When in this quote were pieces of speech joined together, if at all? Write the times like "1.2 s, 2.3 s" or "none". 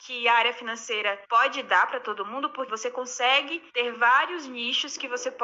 1.2 s, 2.7 s, 3.7 s